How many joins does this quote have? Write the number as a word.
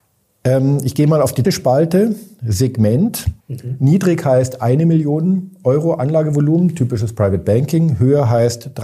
two